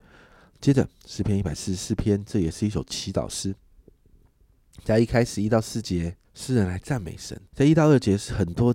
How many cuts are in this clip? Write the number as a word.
three